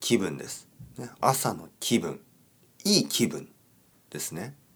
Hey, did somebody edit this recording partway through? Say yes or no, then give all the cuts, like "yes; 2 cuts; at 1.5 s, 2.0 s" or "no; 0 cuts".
no; 0 cuts